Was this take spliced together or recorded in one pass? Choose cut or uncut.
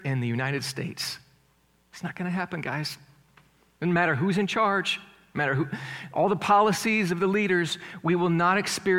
uncut